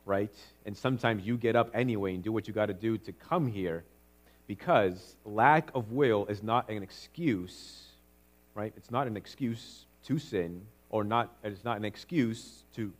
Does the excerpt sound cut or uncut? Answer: cut